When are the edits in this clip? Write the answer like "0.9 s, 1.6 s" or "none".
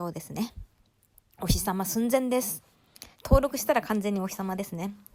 3.1 s